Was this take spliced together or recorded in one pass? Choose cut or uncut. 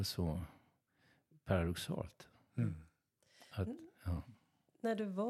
uncut